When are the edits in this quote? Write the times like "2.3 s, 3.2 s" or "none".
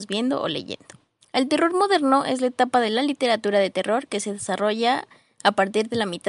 none